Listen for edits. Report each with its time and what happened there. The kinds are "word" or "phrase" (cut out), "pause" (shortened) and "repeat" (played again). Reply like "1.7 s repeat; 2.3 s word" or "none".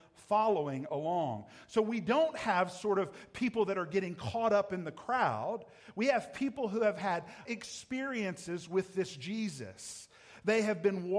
7.5 s word

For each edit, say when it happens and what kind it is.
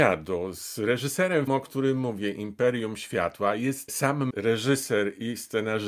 1.5 s word; 3.9 s word; 4.3 s word

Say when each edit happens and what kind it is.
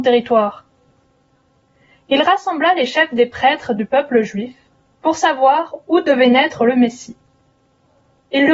none

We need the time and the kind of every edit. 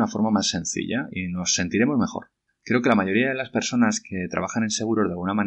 2.5 s pause

